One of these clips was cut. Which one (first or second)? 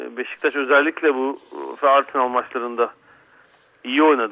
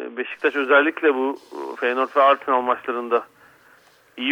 first